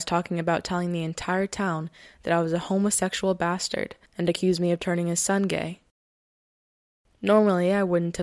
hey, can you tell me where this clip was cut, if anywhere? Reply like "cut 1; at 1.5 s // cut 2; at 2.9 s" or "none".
cut 1; at 4.1 s